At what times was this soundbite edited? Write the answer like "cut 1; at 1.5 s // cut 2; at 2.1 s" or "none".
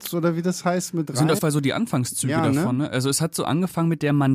cut 1; at 1.4 s